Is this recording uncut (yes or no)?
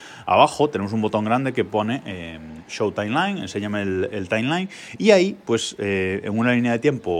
yes